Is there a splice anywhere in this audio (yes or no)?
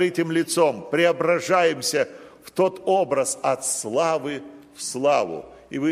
no